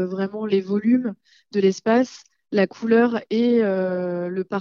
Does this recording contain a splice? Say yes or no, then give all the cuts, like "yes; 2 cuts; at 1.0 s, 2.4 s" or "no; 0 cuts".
no; 0 cuts